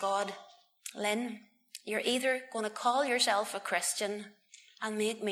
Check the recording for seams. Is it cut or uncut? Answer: uncut